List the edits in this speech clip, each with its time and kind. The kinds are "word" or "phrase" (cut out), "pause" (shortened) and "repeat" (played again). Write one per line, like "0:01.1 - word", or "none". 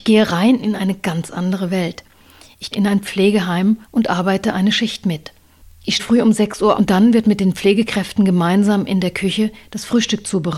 0:02.7 - word
0:03.8 - pause
0:06.0 - word
0:06.7 - word